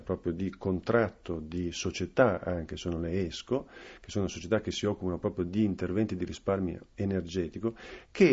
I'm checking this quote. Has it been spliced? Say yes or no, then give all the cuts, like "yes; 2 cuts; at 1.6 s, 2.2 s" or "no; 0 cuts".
no; 0 cuts